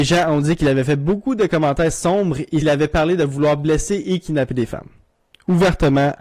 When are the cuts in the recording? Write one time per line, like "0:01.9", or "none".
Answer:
0:02.6